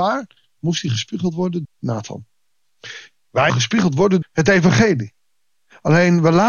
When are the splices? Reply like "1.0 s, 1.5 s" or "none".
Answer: 1.6 s, 3.5 s, 4.2 s